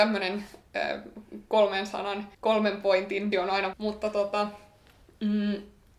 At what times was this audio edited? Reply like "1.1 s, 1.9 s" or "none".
2.3 s, 3.3 s, 3.7 s